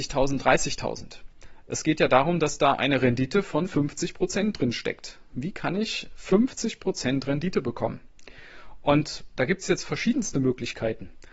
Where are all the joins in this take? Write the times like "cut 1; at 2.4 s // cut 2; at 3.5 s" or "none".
none